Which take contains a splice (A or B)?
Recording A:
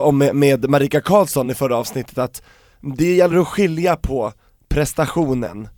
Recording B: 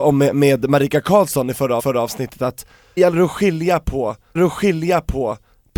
B